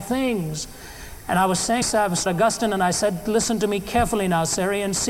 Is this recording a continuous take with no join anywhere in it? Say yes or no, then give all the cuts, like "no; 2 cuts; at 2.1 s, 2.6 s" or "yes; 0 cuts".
no; 2 cuts; at 1.8 s, 2.3 s